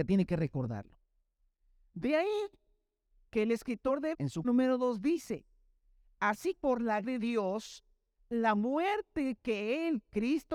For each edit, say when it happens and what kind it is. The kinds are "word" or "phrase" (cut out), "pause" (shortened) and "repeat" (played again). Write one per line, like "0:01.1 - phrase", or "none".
0:04.1 - word
0:04.4 - word
0:06.6 - word
0:07.0 - word